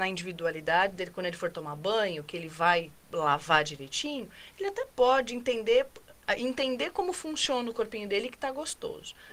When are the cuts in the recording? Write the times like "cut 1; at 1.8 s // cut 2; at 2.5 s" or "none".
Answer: none